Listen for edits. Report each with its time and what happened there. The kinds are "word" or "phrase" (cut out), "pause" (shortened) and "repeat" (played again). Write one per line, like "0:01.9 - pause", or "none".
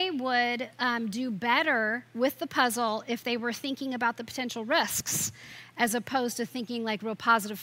none